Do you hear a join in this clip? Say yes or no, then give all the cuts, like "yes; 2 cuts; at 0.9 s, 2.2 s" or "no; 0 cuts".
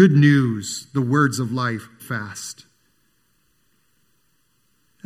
yes; 1 cut; at 2.0 s